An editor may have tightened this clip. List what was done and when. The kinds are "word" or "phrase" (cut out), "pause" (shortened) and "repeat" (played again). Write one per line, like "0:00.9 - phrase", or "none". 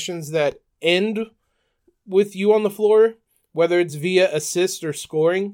none